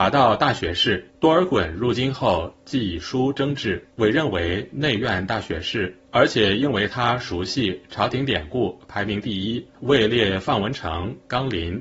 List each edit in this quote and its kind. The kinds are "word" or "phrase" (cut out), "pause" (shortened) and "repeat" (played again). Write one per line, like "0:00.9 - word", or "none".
0:01.1 - pause
0:03.9 - pause
0:06.1 - pause
0:09.7 - pause